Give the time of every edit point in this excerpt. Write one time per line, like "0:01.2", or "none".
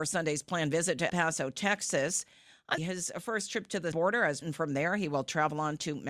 0:01.1
0:02.8
0:03.9
0:04.4